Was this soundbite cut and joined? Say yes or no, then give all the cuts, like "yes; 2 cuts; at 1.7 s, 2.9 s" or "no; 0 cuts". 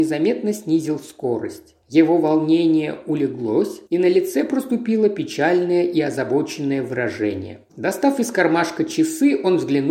yes; 3 cuts; at 1.8 s, 3.9 s, 7.7 s